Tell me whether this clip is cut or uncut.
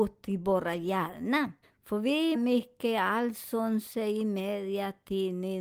cut